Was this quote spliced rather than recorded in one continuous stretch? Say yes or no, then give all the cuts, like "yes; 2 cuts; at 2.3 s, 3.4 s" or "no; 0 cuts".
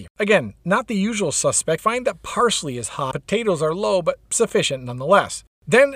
yes; 2 cuts; at 1.8 s, 3.1 s